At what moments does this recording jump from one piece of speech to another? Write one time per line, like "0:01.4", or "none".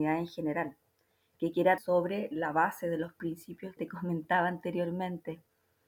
0:01.8
0:03.8